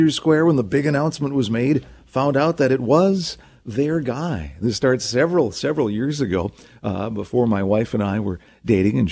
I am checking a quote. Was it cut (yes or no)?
no